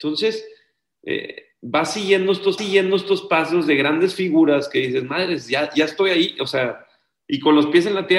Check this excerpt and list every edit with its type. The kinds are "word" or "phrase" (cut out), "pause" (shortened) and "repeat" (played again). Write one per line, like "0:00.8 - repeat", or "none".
0:02.6 - repeat